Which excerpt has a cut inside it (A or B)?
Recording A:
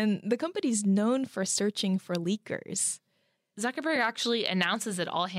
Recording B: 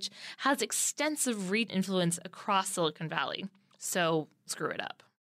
B